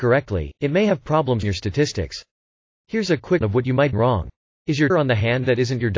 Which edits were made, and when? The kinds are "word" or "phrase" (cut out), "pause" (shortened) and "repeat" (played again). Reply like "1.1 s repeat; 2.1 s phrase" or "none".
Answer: 1.4 s word; 3.4 s word; 3.9 s phrase; 4.4 s pause; 4.9 s word